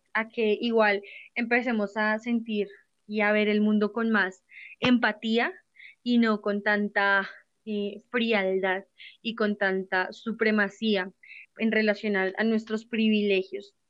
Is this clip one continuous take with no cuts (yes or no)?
no